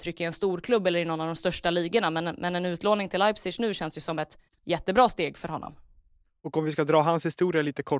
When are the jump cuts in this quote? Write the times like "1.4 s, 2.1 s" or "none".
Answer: 4.5 s

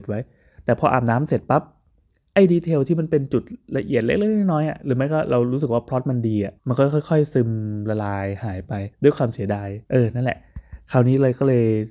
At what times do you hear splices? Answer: 6.6 s, 8.9 s, 9.9 s

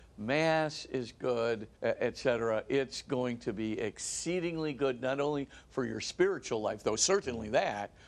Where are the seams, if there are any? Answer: 1.7 s

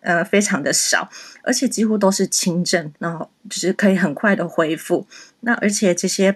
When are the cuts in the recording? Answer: 3.0 s

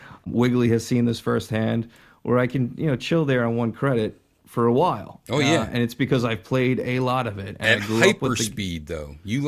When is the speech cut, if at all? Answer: none

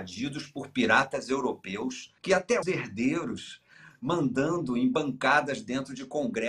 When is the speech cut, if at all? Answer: 2.2 s, 2.6 s

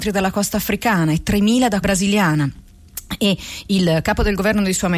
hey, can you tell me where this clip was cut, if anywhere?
1.8 s

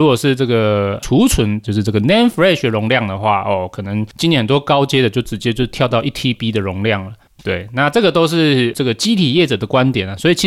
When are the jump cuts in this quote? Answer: none

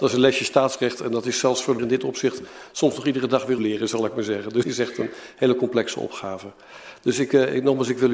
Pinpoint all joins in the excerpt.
1.8 s, 3.6 s, 4.6 s

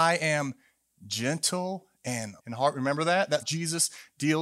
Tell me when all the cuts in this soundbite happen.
2.4 s, 3.4 s

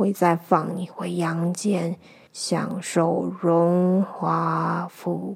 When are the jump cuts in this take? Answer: 2.3 s

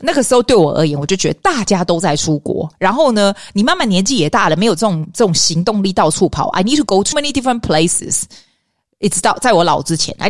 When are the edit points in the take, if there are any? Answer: 7.1 s

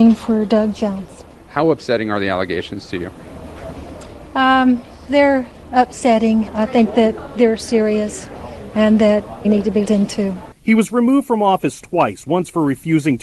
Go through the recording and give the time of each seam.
6.5 s, 7.3 s, 9.4 s, 9.8 s

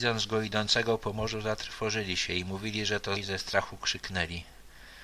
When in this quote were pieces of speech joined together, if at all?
3.2 s

